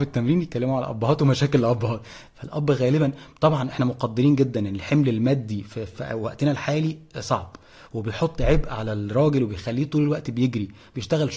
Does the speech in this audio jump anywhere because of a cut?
no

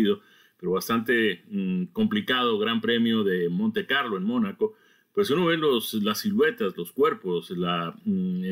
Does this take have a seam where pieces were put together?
no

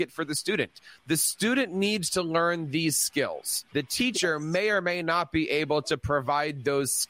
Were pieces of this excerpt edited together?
yes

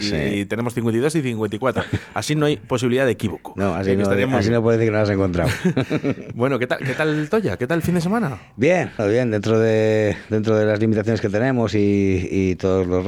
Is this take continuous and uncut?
no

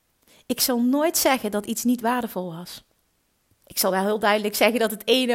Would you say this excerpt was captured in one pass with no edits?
yes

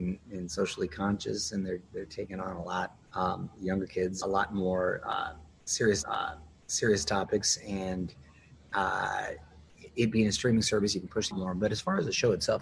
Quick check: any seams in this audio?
yes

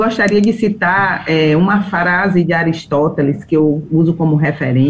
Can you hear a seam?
no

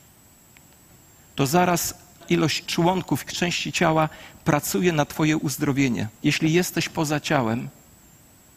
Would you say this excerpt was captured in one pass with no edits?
no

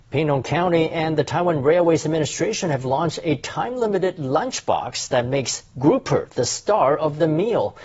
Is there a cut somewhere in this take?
no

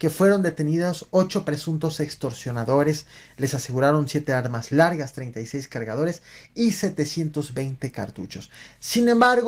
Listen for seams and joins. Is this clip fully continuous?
yes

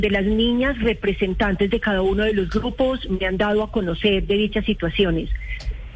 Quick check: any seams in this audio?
no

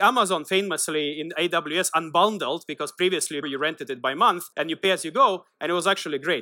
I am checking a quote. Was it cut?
yes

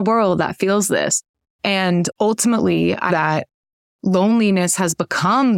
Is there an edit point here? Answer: yes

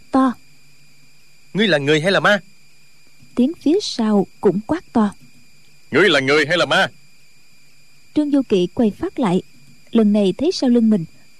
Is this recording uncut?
yes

